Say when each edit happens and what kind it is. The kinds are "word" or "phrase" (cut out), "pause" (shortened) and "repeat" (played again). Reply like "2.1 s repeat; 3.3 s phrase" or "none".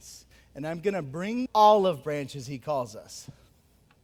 1.5 s phrase